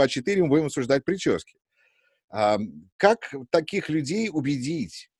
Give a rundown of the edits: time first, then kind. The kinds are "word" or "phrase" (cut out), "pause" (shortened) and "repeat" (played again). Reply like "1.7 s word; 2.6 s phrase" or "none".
none